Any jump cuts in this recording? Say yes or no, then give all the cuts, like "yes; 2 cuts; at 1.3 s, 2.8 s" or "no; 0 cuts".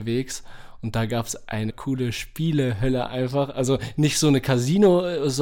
yes; 1 cut; at 1.7 s